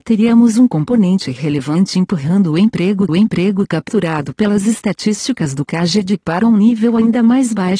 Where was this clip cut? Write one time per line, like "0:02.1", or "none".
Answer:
0:03.1